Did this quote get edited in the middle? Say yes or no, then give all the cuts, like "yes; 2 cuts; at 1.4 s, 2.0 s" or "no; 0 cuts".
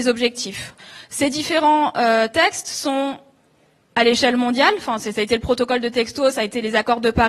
no; 0 cuts